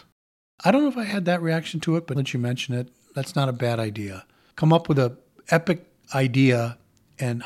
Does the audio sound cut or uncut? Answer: cut